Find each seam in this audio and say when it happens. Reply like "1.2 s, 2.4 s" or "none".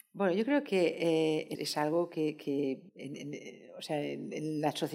1.5 s, 2.9 s